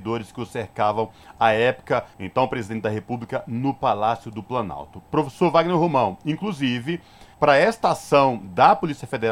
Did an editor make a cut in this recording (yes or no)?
yes